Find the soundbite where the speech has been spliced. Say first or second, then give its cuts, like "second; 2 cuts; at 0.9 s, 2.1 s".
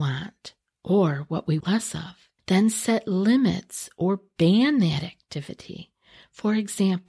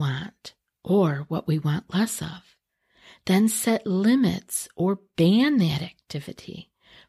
first; 2 cuts; at 1.6 s, 2.4 s